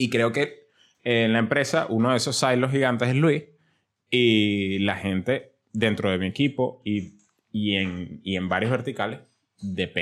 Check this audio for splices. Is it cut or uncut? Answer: uncut